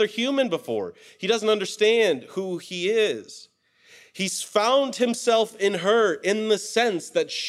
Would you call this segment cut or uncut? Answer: uncut